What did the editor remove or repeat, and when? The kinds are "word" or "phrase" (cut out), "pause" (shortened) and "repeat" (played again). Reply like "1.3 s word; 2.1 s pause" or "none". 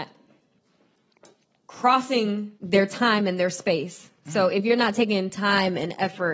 2.6 s pause